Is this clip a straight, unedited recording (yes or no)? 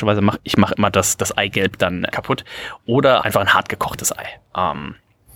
no